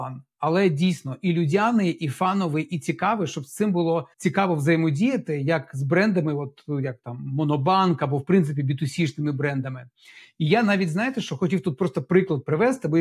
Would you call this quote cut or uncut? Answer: cut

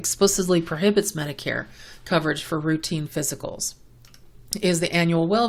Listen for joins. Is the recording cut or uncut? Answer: uncut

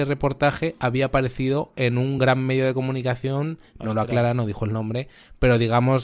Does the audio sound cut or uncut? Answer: uncut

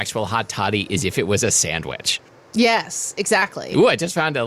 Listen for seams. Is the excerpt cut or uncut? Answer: uncut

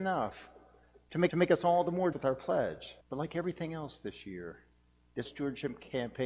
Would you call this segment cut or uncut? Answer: cut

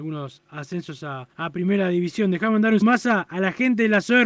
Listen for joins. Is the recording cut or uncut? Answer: cut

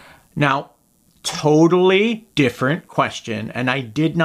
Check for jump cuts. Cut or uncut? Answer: cut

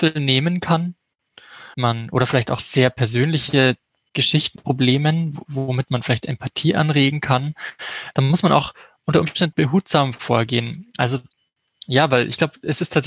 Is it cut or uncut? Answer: cut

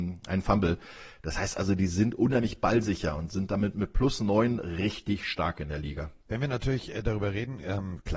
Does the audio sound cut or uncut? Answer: cut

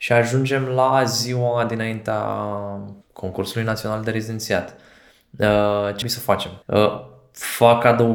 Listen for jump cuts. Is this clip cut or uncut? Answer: cut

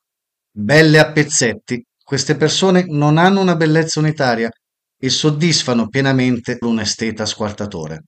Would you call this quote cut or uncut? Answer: cut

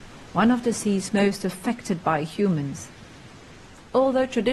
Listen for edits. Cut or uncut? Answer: uncut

